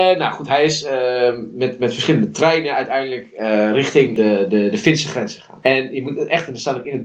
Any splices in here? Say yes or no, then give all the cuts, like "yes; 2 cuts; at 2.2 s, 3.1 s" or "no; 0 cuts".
no; 0 cuts